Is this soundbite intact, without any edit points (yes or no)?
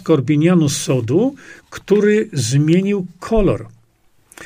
yes